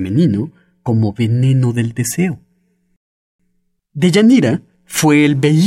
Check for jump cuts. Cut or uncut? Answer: uncut